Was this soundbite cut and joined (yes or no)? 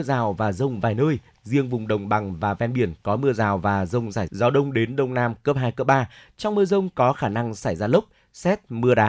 yes